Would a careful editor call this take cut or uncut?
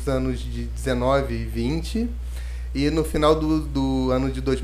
uncut